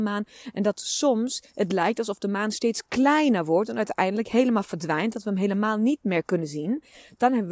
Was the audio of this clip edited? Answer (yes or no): no